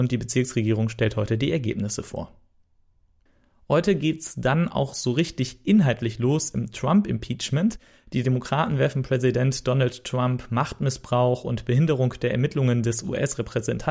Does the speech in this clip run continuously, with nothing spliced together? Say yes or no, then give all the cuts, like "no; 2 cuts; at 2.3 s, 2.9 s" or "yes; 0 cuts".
yes; 0 cuts